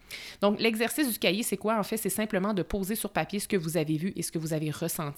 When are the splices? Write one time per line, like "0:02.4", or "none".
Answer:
none